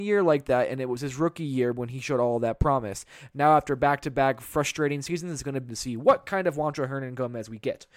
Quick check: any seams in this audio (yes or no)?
yes